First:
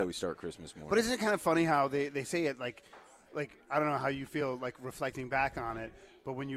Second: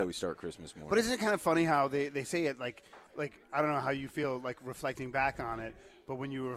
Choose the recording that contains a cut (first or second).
second